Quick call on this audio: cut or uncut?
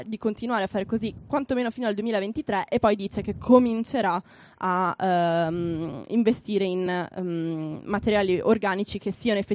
uncut